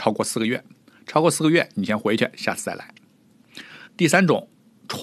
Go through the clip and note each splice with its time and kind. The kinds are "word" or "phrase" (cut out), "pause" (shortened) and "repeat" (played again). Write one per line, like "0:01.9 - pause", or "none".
0:03.9 - pause